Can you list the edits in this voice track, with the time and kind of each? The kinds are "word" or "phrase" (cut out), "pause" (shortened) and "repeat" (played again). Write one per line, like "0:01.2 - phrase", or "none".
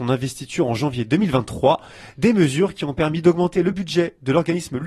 none